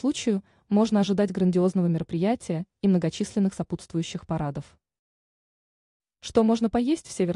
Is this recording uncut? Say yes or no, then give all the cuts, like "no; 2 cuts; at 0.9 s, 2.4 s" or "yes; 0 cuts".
yes; 0 cuts